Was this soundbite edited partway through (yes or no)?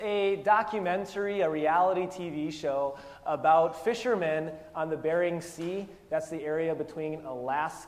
no